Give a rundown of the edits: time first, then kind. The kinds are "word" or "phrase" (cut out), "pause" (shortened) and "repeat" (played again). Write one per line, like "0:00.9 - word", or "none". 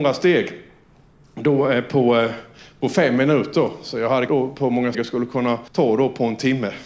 0:04.3 - word
0:04.9 - word
0:05.7 - pause